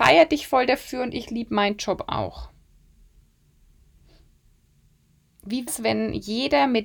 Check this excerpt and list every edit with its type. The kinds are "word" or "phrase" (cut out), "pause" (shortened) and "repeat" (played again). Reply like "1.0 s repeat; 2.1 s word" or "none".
5.7 s word